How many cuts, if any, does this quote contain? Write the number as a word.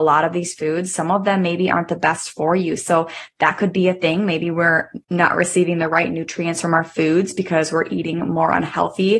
one